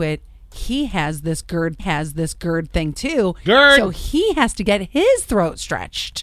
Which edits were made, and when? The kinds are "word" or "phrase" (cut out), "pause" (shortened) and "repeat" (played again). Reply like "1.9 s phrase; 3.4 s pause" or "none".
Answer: 1.8 s repeat

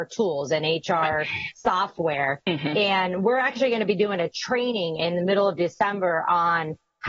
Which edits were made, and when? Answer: none

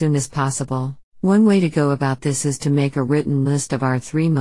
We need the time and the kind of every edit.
1.1 s pause

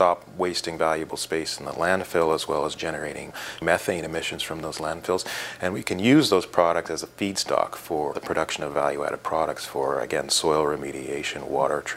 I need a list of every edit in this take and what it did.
none

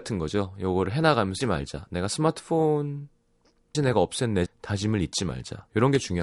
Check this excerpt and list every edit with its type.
1.4 s word; 3.7 s word; 4.5 s word

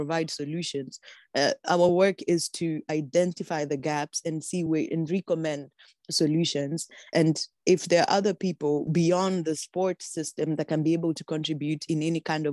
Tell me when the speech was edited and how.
none

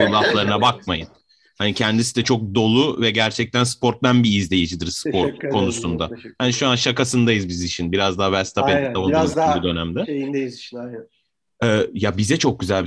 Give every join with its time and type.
none

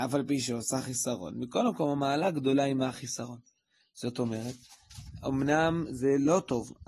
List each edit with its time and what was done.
none

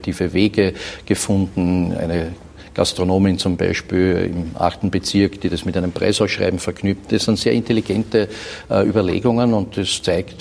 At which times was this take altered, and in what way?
none

